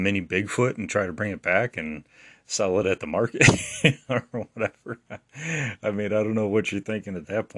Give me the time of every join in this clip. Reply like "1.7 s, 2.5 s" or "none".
none